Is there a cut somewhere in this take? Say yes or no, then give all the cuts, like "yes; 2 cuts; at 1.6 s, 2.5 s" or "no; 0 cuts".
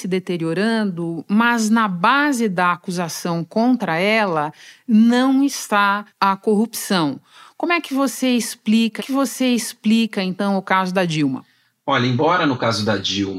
yes; 2 cuts; at 6.1 s, 9.0 s